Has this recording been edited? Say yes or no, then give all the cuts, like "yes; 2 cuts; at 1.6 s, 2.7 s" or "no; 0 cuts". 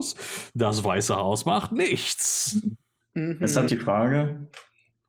yes; 1 cut; at 3.7 s